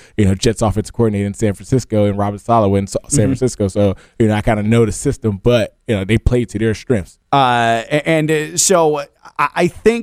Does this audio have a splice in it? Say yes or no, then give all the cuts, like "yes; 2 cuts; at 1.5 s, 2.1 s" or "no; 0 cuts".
yes; 1 cut; at 7.3 s